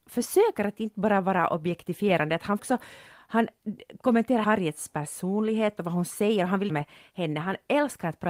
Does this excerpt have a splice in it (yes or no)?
yes